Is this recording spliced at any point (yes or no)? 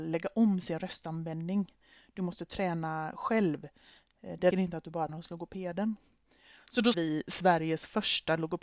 yes